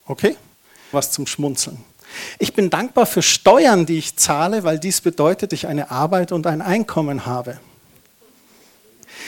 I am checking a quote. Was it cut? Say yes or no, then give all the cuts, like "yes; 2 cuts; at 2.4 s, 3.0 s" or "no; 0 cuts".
yes; 2 cuts; at 0.9 s, 5.5 s